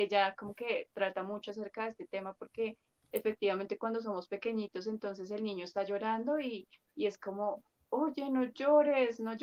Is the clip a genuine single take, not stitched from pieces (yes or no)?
yes